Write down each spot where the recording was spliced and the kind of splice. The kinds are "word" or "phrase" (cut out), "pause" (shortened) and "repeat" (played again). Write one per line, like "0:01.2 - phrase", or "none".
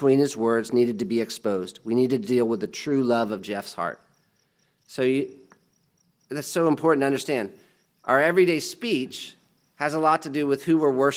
none